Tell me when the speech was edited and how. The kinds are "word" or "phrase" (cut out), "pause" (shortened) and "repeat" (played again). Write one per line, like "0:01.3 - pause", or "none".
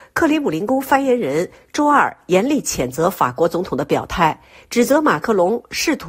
none